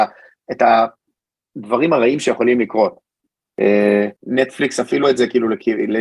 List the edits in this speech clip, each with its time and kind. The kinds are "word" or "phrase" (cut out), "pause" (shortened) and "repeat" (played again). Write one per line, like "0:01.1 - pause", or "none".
0:04.2 - pause
0:05.0 - word